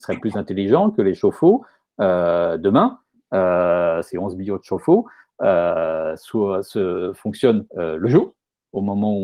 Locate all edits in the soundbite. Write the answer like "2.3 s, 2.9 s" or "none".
7.7 s